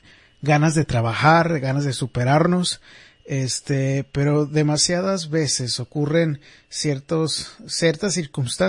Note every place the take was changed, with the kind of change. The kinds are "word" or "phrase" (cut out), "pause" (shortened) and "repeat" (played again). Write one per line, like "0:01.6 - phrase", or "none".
none